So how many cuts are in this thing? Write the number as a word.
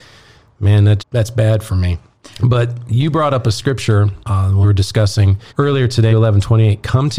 six